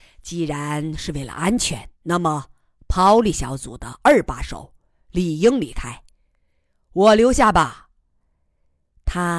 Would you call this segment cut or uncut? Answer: cut